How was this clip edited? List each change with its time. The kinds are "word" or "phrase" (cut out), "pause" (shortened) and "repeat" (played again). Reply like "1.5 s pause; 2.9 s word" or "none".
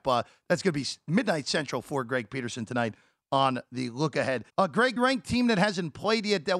4.5 s pause; 5.0 s phrase